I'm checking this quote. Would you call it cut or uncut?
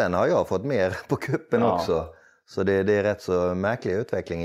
uncut